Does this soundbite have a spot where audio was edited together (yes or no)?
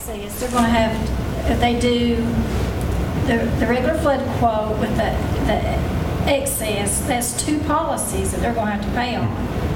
no